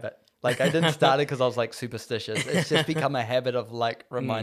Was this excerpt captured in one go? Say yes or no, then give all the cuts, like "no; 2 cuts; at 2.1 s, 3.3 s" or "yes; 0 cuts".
yes; 0 cuts